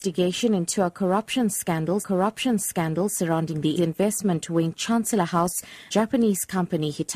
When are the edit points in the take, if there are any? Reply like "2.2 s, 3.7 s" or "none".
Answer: 2.0 s, 3.8 s, 5.9 s